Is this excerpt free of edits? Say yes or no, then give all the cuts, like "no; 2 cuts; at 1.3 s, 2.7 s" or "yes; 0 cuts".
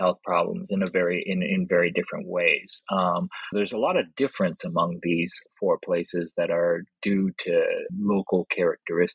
no; 3 cuts; at 3.5 s, 5.5 s, 7.9 s